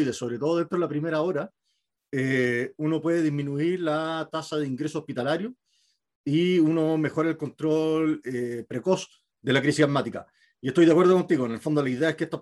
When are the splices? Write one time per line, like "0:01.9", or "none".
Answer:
none